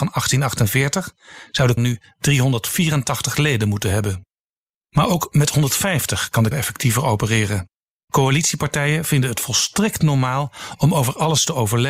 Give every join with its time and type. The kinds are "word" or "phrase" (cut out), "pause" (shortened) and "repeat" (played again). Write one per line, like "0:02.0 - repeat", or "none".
0:01.8 - word
0:06.5 - word